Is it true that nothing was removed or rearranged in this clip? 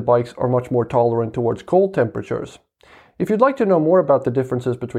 yes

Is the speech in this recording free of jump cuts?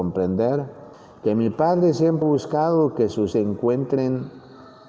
no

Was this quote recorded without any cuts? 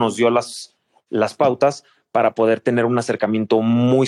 yes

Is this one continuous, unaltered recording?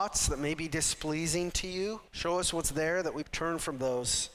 no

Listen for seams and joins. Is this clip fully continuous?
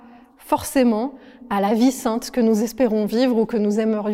yes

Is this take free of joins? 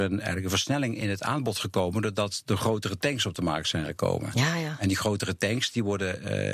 yes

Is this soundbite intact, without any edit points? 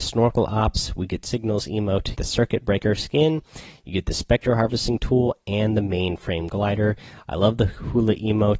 no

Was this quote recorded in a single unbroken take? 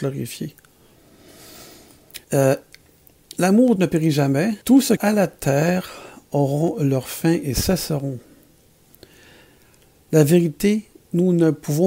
no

